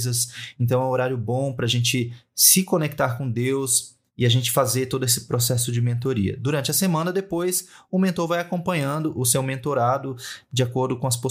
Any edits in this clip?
no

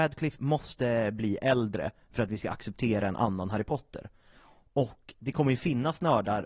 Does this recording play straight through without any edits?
yes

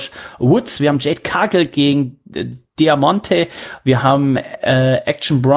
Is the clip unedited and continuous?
yes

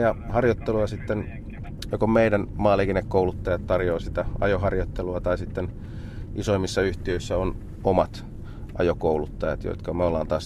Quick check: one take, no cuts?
no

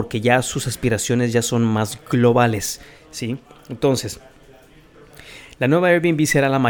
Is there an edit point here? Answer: no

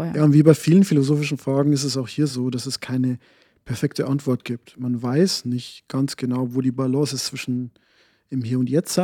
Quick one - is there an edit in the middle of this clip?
no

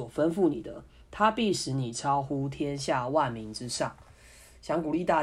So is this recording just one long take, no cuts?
yes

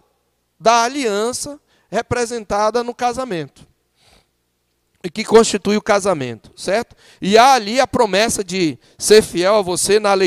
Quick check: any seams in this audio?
no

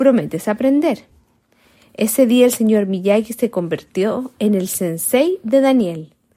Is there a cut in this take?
no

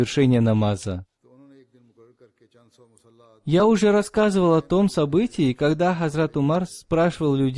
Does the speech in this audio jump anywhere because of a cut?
no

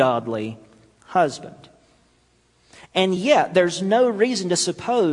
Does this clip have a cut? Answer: no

